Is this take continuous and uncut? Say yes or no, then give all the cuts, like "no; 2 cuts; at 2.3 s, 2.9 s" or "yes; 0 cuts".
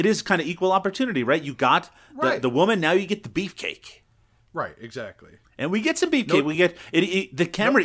yes; 0 cuts